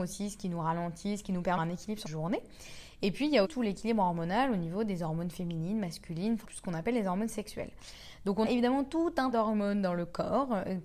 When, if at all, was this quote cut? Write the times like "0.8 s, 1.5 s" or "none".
1.6 s, 2.0 s, 3.4 s, 6.4 s, 8.4 s, 9.3 s

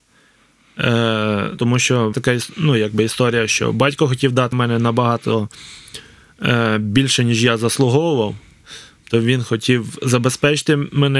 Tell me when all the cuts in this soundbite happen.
1.6 s, 2.1 s, 4.5 s

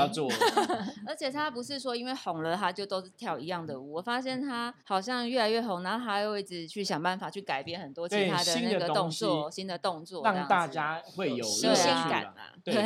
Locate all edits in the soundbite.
4.8 s

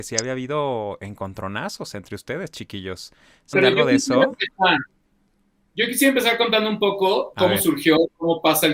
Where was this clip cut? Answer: 3.5 s

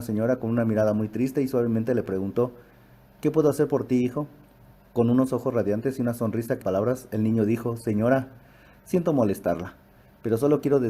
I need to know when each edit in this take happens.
6.6 s

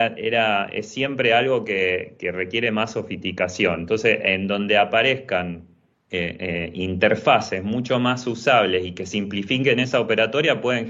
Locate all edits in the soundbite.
5.9 s

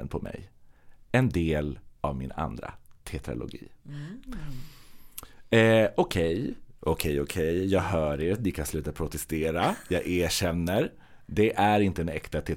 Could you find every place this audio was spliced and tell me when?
2.0 s

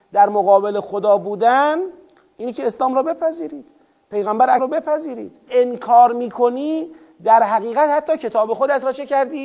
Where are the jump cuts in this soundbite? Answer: 4.6 s, 5.5 s

